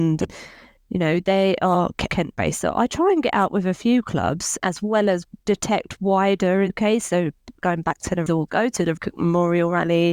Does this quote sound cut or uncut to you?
cut